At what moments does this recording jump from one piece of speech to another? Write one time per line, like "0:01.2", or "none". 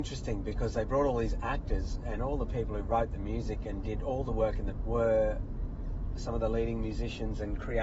0:04.8